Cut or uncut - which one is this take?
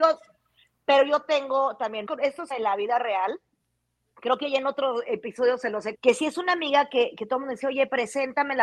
cut